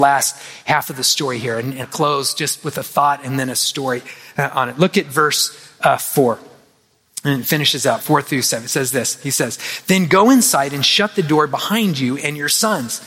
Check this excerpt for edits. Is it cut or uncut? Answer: cut